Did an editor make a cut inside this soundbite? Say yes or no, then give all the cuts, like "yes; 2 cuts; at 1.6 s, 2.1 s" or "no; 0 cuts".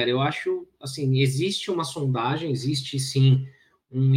no; 0 cuts